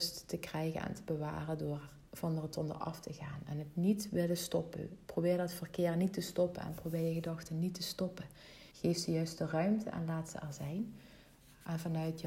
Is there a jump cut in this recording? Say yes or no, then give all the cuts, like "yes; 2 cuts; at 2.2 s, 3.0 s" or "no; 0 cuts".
yes; 2 cuts; at 2.1 s, 8.7 s